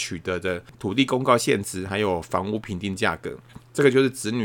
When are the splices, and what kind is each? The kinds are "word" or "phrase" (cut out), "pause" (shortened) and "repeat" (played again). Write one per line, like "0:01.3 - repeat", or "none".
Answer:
none